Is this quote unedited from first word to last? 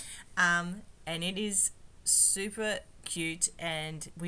yes; 0 cuts

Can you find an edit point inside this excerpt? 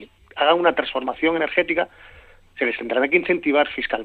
no; 0 cuts

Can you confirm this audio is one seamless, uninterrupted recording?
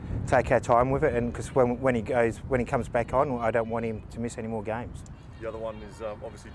no; 1 cut; at 4.0 s

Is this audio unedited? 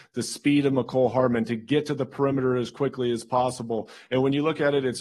yes; 0 cuts

